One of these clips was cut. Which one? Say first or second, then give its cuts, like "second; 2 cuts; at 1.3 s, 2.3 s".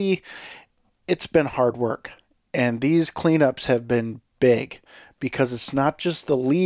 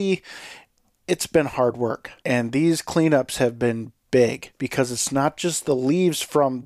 second; 2 cuts; at 2.2 s, 4.5 s